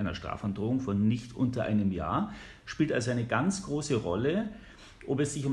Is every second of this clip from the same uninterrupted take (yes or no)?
yes